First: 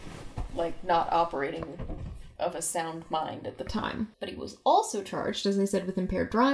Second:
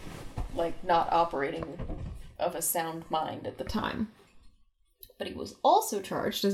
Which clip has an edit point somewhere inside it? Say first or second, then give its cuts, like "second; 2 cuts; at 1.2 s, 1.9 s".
first; 1 cut; at 4.1 s